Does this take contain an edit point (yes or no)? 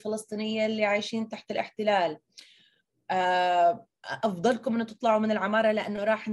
no